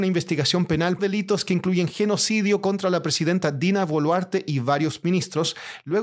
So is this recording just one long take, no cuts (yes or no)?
no